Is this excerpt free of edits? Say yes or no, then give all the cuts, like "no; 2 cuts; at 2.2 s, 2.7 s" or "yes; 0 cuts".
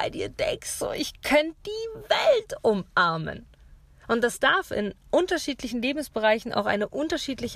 yes; 0 cuts